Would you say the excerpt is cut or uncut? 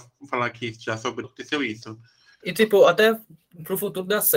cut